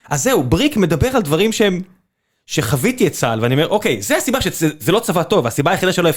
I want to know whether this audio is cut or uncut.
uncut